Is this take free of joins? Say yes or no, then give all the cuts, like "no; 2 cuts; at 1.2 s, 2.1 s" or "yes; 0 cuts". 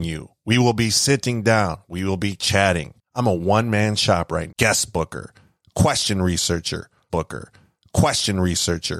no; 2 cuts; at 4.5 s, 7.1 s